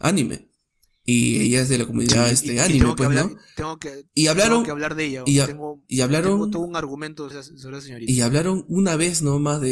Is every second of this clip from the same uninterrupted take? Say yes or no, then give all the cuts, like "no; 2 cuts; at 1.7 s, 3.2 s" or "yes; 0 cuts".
no; 1 cut; at 7.3 s